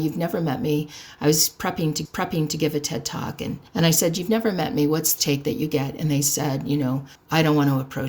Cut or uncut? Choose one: cut